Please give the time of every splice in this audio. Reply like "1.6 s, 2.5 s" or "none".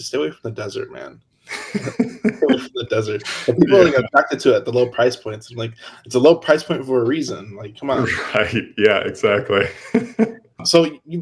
none